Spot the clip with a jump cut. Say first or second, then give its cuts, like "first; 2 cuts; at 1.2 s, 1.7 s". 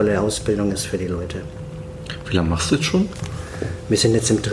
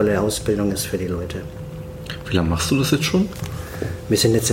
first; 1 cut; at 2.7 s